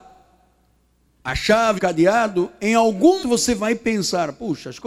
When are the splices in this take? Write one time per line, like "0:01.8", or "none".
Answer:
0:01.8
0:03.2